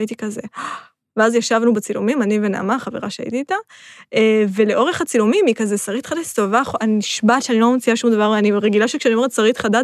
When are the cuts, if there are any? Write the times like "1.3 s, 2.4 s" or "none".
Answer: none